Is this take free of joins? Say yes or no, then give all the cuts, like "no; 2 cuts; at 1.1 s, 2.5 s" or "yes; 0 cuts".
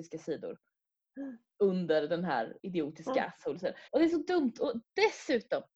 no; 1 cut; at 3.9 s